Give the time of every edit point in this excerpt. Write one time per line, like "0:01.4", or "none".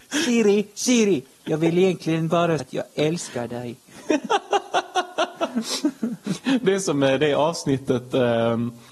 0:02.6